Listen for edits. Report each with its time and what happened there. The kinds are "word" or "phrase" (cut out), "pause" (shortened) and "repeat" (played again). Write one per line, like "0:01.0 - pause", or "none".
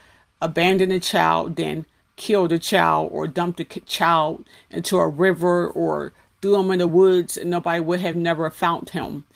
none